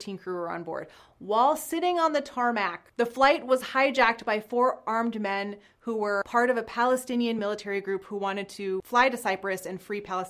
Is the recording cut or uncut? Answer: uncut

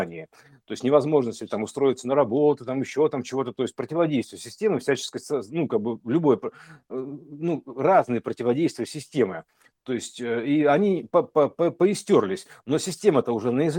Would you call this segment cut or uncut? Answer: uncut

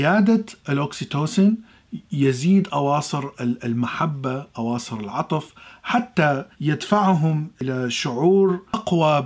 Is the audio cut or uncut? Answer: cut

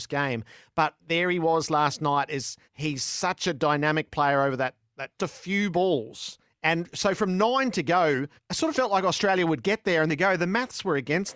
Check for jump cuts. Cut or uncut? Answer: cut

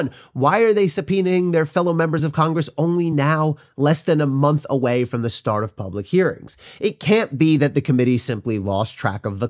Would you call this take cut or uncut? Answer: uncut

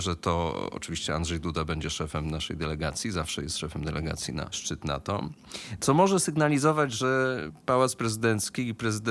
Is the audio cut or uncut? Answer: uncut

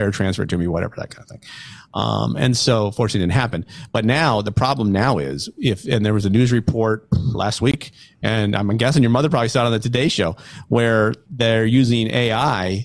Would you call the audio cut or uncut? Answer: uncut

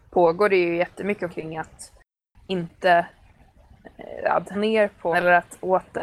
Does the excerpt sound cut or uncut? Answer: cut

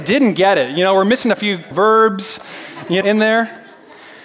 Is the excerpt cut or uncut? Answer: cut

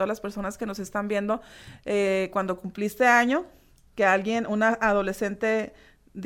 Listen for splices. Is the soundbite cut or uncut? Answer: uncut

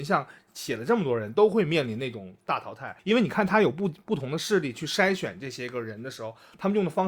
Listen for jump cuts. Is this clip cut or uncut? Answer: cut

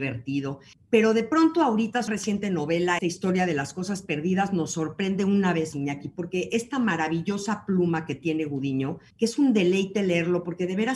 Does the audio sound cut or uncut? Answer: cut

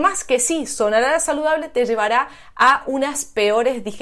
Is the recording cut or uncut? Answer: uncut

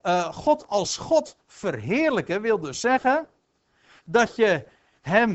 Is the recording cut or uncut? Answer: uncut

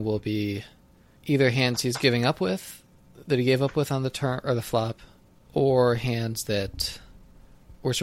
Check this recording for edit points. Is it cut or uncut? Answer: uncut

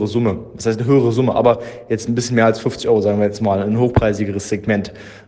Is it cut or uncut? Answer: uncut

